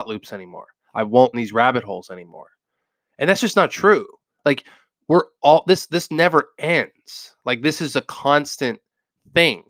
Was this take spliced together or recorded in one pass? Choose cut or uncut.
cut